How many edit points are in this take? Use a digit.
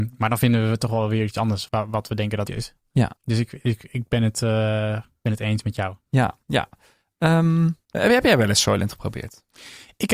5